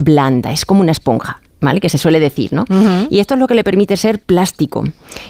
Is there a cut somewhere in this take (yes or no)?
no